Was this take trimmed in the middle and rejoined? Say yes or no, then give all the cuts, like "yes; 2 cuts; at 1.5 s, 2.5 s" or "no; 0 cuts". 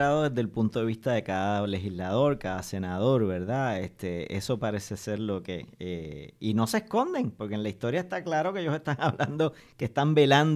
no; 0 cuts